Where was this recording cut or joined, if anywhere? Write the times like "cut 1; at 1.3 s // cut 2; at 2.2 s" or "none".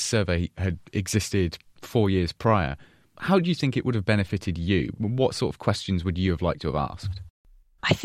none